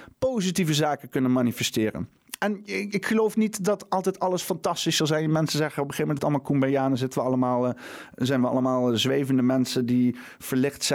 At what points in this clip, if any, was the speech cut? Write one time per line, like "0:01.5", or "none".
0:06.2